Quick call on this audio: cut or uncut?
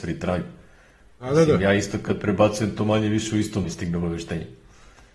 cut